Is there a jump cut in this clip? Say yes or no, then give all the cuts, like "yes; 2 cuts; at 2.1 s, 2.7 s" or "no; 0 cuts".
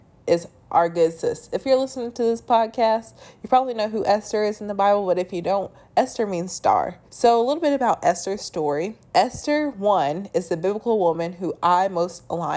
yes; 2 cuts; at 7.1 s, 9.1 s